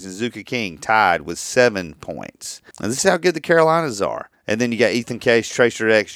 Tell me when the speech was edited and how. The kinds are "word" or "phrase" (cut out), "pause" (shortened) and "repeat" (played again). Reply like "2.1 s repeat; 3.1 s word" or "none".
2.7 s pause; 4.3 s pause